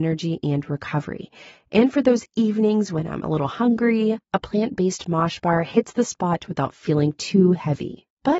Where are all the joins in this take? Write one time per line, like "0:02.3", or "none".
none